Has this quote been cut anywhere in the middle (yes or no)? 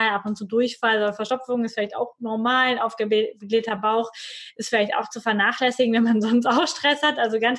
no